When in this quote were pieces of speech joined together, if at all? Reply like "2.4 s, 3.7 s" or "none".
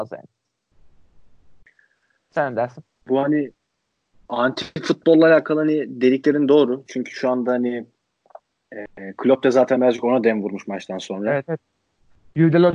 none